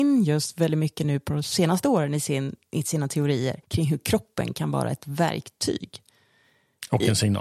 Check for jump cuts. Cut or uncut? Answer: cut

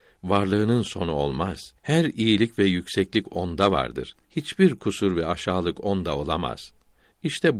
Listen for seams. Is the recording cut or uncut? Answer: cut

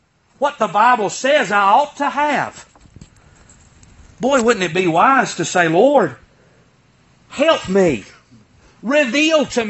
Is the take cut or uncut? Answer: uncut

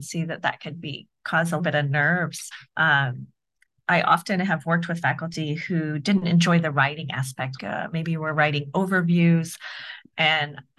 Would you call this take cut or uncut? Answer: cut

